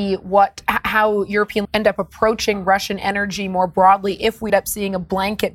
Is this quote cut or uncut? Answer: cut